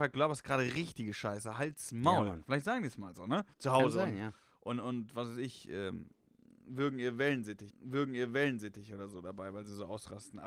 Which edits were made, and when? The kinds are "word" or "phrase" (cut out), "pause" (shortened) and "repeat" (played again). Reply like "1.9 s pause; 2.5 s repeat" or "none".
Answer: 3.5 s pause; 7.7 s repeat